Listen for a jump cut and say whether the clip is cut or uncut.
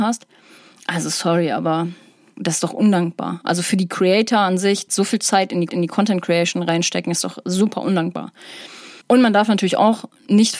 cut